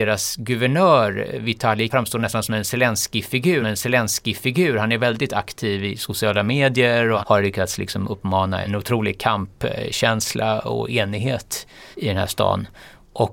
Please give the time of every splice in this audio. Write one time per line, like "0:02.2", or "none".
0:01.9
0:03.6
0:07.2
0:11.9